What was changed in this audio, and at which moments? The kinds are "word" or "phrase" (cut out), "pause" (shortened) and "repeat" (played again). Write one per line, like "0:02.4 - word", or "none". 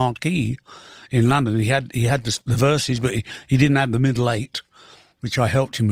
none